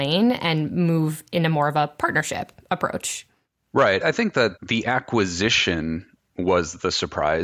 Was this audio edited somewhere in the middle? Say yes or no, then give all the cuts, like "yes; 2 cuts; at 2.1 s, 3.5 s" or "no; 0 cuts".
yes; 1 cut; at 3.5 s